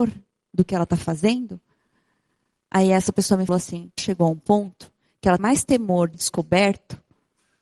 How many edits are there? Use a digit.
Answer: 4